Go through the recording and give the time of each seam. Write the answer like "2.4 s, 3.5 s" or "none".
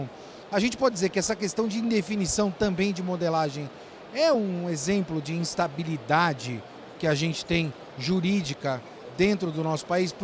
none